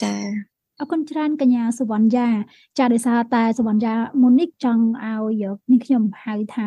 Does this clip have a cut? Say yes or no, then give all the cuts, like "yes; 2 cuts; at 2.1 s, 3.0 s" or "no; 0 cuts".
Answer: no; 0 cuts